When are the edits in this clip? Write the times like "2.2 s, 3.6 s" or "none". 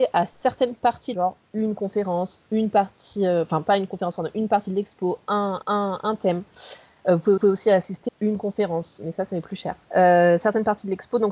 1.1 s, 2.5 s, 5.6 s, 7.4 s, 8.1 s, 9.8 s